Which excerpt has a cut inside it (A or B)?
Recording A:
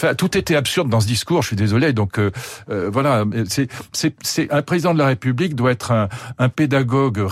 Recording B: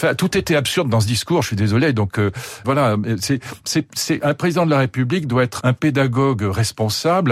B